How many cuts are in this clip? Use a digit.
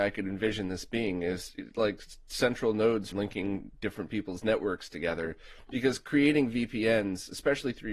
1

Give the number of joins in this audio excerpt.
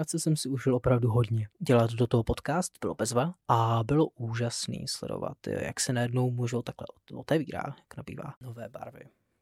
1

